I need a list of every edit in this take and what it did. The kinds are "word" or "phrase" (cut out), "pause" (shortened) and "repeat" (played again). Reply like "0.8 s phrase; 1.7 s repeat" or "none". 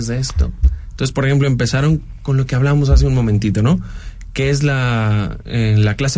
none